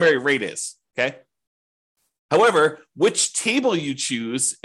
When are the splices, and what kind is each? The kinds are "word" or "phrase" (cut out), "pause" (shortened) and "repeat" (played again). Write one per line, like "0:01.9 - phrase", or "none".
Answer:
none

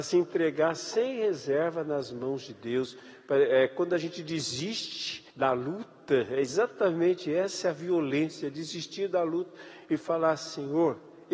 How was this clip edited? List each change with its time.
0:05.3 - pause

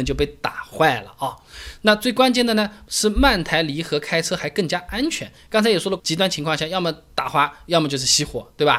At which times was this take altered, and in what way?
0:06.0 - phrase

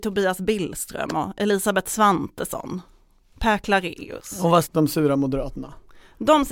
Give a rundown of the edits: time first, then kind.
0:04.6 - word

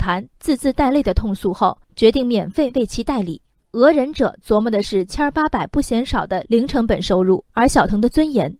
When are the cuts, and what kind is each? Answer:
0:01.8 - pause
0:03.6 - pause
0:07.5 - pause

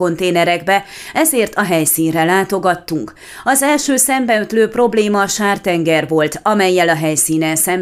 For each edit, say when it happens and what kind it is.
none

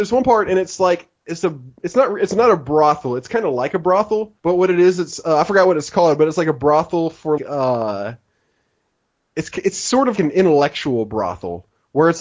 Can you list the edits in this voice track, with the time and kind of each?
0:04.4 - pause
0:07.4 - word
0:10.2 - word

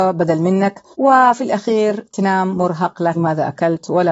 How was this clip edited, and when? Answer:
0:00.9 - pause
0:03.1 - word

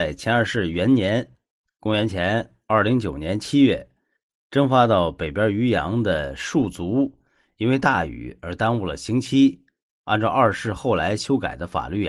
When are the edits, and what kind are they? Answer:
none

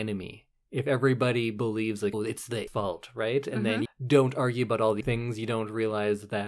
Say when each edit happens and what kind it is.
0:02.1 - word
0:02.7 - word
0:03.9 - word
0:05.0 - word

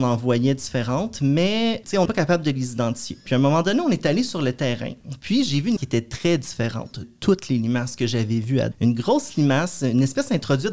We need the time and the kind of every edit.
0:02.1 - word
0:05.8 - word
0:07.0 - word
0:08.7 - word

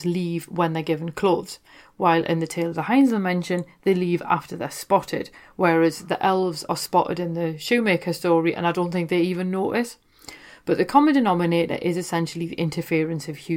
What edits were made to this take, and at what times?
none

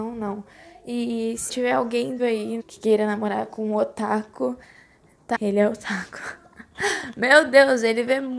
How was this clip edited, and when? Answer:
0:01.5 - word
0:02.2 - word
0:02.6 - word
0:05.3 - word

